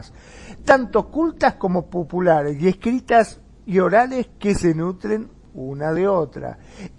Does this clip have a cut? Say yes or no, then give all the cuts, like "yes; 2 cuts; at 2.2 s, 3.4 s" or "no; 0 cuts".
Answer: no; 0 cuts